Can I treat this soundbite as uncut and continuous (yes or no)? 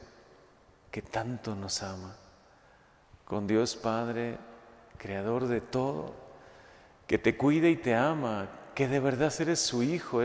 yes